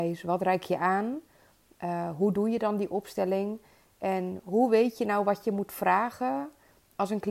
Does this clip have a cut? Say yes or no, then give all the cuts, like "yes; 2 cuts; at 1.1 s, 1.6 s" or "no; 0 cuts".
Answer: no; 0 cuts